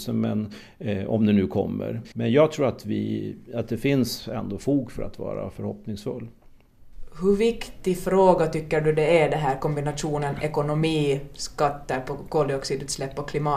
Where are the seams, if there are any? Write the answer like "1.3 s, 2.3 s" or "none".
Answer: 2.1 s